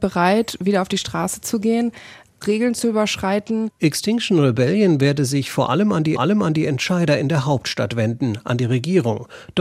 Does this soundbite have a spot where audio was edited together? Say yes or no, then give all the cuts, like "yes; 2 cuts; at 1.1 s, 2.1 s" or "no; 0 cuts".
yes; 2 cuts; at 2.4 s, 6.2 s